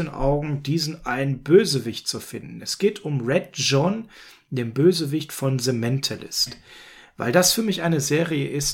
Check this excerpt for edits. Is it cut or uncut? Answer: uncut